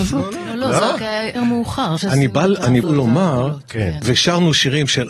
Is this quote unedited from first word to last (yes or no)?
no